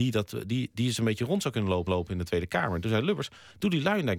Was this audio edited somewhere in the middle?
yes; 1 cut; at 1.9 s

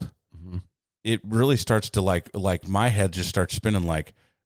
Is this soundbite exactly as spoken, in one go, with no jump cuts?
yes; 0 cuts

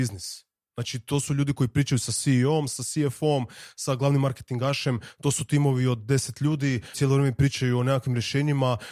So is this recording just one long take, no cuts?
no; 1 cut; at 6.9 s

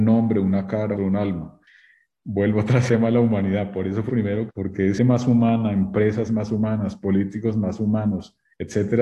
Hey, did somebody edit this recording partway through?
yes; 6 cuts; at 1.0 s, 2.9 s, 4.1 s, 4.5 s, 5.0 s, 6.3 s

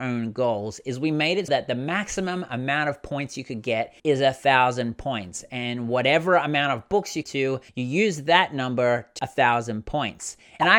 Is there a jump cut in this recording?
yes; 5 cuts; at 1.5 s, 4.0 s, 7.2 s, 7.7 s, 9.2 s

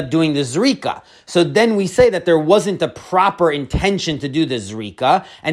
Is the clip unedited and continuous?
yes; 0 cuts

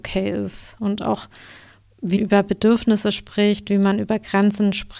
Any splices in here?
yes; 1 cut; at 2.2 s

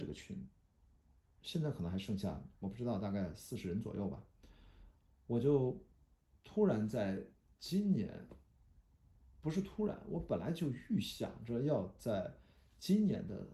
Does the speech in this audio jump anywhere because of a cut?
no; 0 cuts

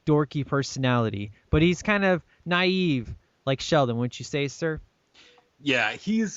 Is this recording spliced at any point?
no; 0 cuts

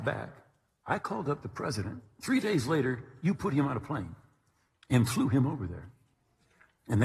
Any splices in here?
no; 0 cuts

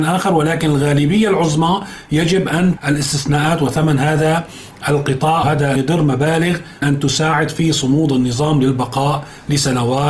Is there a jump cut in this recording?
yes; 4 cuts; at 2.8 s, 5.4 s, 5.8 s, 6.8 s

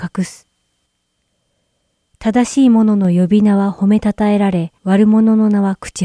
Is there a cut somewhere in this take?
yes; 1 cut; at 4.8 s

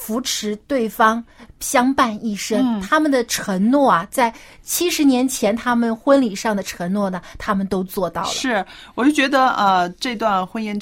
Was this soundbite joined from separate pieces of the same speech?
no; 0 cuts

